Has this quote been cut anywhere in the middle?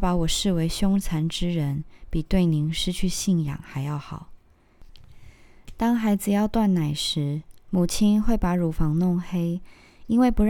yes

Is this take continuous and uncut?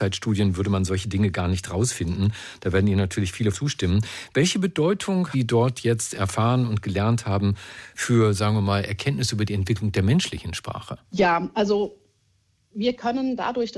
no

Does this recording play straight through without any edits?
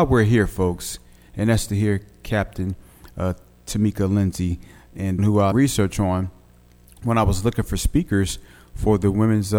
no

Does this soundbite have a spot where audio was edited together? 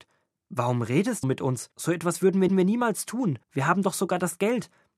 yes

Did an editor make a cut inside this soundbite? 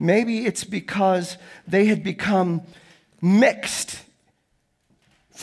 no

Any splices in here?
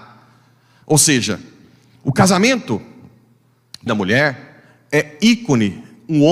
yes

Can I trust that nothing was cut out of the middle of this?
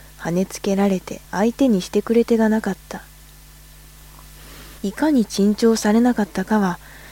no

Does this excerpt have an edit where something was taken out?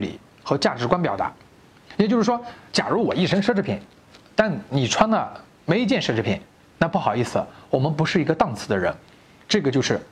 no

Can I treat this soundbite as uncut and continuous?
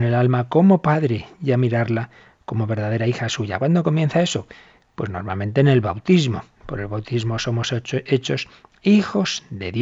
yes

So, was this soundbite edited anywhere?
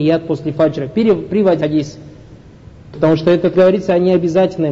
yes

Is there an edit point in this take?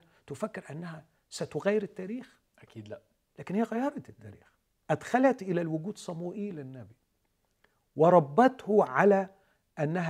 yes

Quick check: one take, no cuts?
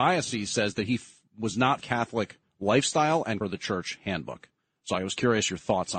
no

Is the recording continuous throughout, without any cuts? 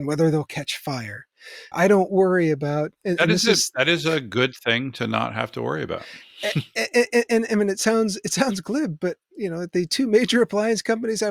no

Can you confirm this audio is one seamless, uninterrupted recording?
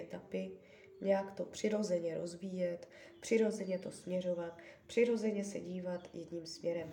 yes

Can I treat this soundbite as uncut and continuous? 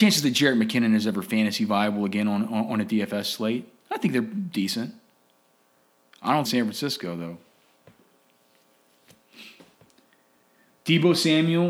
no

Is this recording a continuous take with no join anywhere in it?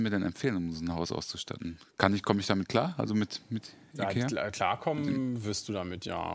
yes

